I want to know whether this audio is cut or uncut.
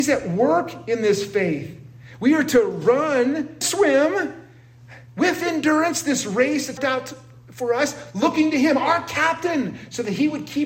cut